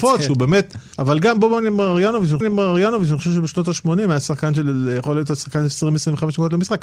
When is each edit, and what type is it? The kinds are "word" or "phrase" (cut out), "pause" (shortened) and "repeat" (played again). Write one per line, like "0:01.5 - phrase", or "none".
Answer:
0:00.9 - pause
0:02.4 - repeat